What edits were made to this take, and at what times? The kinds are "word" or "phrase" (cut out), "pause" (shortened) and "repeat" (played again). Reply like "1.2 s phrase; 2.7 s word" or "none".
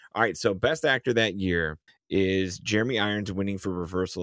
1.9 s pause